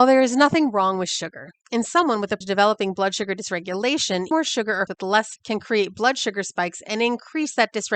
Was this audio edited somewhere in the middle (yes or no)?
yes